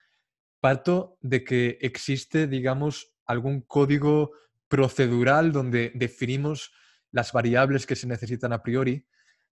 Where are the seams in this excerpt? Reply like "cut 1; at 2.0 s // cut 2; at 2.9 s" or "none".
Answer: cut 1; at 7.3 s